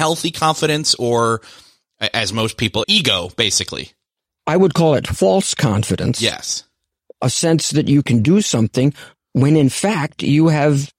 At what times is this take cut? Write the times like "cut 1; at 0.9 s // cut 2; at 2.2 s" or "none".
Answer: cut 1; at 2.8 s